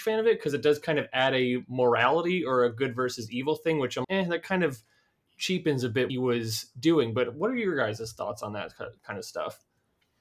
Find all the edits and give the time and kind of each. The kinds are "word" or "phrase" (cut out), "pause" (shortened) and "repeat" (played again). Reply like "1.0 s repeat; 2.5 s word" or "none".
4.0 s word; 6.1 s phrase